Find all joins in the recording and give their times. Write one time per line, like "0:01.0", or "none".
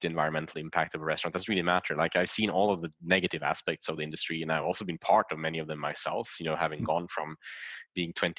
none